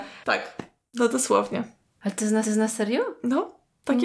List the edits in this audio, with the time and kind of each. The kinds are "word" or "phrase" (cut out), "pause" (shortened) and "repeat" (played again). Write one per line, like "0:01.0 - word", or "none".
0:02.4 - repeat